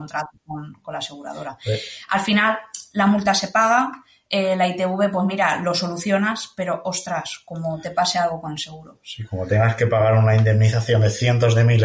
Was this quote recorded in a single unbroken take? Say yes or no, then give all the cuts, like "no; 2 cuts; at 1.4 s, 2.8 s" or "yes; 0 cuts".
yes; 0 cuts